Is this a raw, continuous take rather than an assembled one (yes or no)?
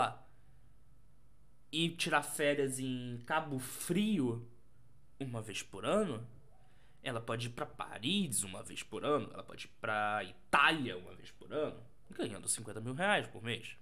yes